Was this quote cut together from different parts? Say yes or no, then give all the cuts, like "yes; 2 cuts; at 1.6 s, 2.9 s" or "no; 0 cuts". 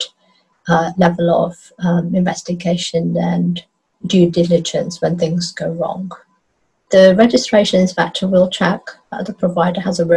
no; 0 cuts